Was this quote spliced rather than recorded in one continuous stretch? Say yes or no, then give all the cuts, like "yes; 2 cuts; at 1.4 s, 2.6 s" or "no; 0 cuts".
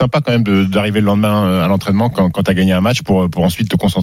yes; 1 cut; at 2.1 s